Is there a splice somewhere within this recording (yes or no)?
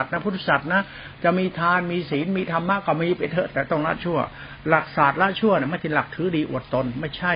no